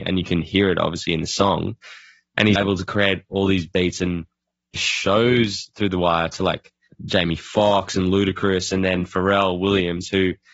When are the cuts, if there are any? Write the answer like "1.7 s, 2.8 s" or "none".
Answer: 2.6 s, 4.8 s